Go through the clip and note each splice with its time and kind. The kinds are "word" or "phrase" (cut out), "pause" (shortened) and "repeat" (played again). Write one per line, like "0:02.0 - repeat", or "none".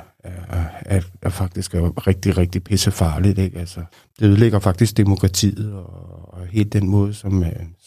none